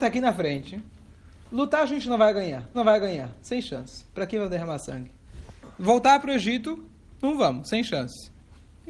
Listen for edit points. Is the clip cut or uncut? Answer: cut